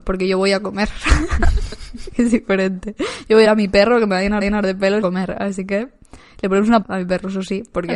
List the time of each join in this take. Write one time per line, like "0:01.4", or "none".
0:03.4
0:04.4
0:05.0
0:06.8